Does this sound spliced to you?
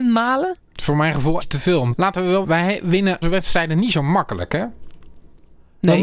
yes; 4 cuts; at 1.4 s, 1.9 s, 2.4 s, 3.2 s

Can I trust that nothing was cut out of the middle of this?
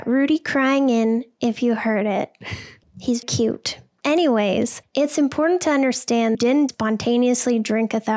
no; 3 cuts; at 3.2 s, 6.3 s, 6.7 s

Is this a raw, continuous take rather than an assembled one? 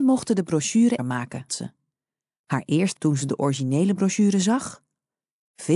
no; 3 cuts; at 1.0 s, 1.5 s, 3.0 s

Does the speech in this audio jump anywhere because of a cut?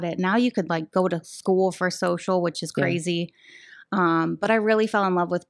no; 0 cuts

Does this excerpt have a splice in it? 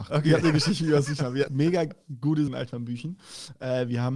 yes; 2 cuts; at 1.5 s, 2.5 s

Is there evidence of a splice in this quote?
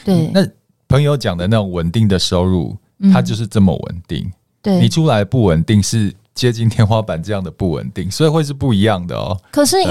no; 0 cuts

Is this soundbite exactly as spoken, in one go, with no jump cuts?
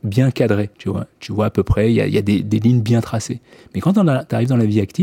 yes; 0 cuts

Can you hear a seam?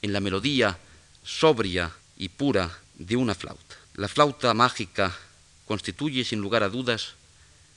yes; 3 cuts; at 2.0 s, 2.8 s, 3.8 s

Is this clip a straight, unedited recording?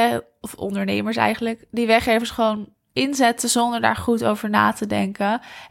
yes; 0 cuts

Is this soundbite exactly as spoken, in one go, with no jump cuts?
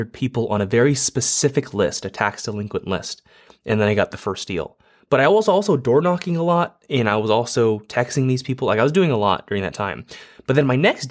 yes; 0 cuts

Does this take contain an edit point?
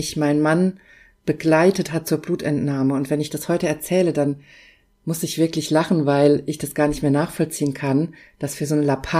no; 0 cuts

